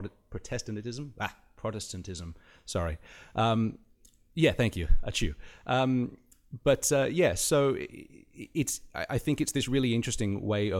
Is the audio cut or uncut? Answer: uncut